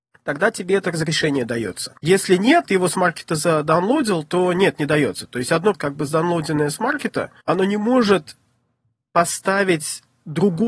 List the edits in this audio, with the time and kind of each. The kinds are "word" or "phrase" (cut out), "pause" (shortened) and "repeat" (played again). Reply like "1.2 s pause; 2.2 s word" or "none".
2.0 s pause; 2.6 s word; 5.7 s word; 7.4 s pause